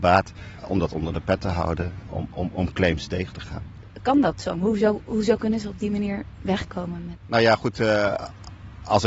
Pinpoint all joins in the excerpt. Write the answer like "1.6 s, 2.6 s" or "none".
none